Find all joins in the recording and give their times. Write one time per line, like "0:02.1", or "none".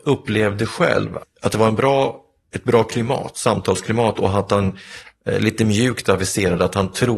none